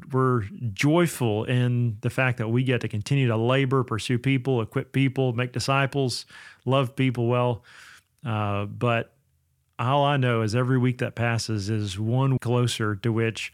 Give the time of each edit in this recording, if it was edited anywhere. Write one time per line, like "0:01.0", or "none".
0:12.4